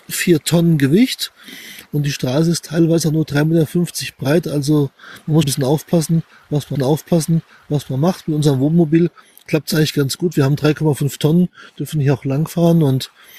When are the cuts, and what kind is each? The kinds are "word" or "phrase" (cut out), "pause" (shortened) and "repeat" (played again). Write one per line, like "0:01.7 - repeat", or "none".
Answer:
0:05.4 - word
0:06.8 - repeat